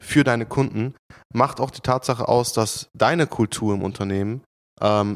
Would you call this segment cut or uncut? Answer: uncut